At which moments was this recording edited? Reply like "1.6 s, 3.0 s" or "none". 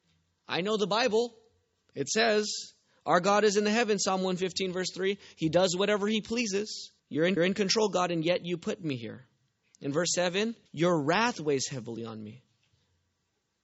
7.0 s, 7.4 s, 10.7 s

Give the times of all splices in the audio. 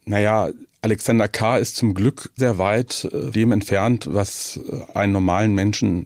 2.4 s, 3.3 s, 4.9 s

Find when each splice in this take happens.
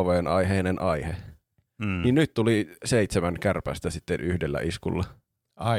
none

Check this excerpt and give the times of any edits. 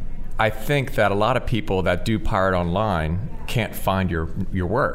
none

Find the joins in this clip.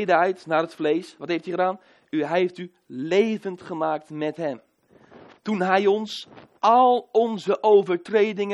none

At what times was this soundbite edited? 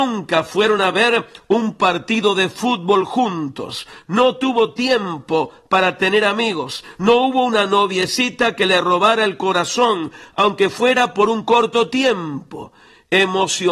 none

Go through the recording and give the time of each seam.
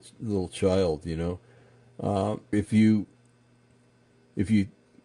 2.5 s

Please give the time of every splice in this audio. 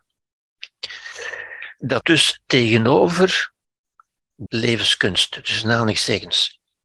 2.0 s, 4.5 s

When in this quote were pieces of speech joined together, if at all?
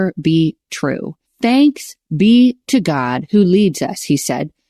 1.3 s

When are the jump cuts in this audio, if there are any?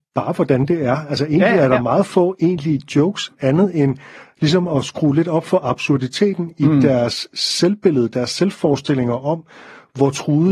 none

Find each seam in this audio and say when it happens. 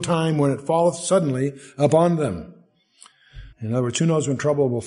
3.5 s

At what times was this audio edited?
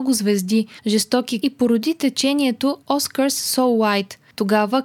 1.4 s

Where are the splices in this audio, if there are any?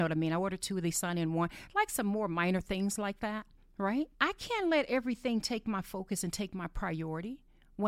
4.1 s

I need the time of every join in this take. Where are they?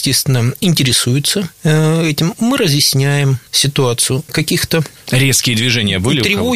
4.3 s

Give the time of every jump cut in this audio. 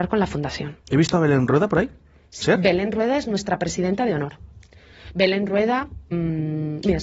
2.4 s, 6.1 s

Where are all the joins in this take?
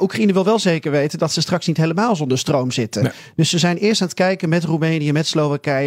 none

